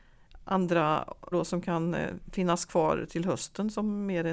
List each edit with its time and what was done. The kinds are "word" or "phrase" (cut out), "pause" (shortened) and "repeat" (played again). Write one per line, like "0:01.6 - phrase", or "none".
0:01.3 - word